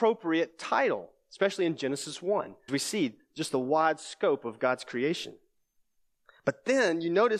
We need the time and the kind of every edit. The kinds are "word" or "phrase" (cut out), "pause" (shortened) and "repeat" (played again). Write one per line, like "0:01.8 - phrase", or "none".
0:02.7 - word